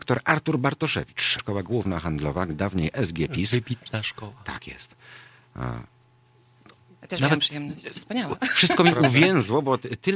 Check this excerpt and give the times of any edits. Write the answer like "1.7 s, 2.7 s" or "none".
1.4 s